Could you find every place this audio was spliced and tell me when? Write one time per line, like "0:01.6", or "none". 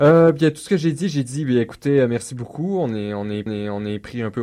0:03.5